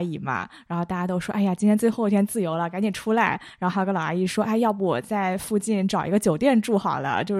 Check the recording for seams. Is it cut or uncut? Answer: uncut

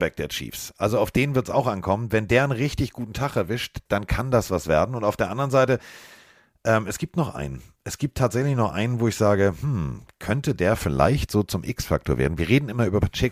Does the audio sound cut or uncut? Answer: uncut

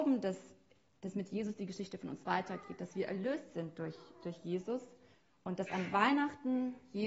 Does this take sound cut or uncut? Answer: uncut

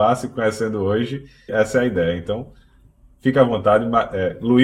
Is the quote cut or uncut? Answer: cut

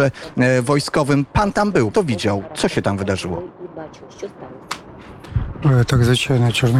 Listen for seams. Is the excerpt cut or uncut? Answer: cut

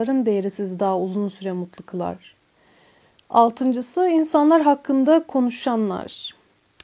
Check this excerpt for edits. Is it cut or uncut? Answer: uncut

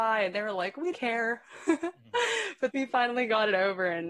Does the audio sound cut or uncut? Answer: cut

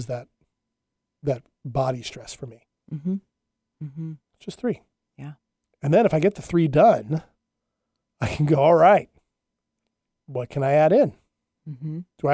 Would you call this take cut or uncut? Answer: uncut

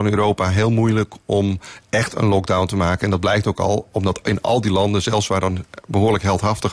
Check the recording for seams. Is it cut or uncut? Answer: uncut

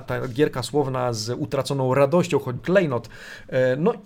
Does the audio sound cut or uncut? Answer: cut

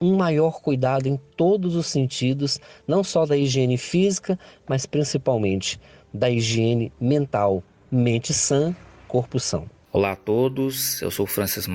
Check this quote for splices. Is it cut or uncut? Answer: uncut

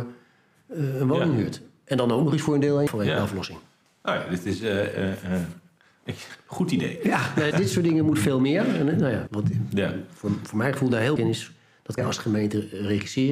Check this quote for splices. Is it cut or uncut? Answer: cut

